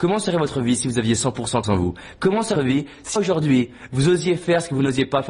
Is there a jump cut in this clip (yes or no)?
yes